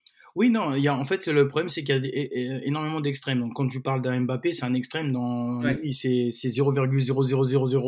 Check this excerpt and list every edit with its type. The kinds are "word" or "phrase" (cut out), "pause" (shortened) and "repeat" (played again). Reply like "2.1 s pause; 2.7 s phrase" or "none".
none